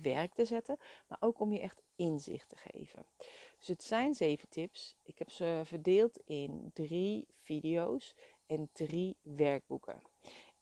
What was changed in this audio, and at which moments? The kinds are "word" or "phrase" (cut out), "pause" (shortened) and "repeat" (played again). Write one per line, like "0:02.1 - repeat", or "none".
none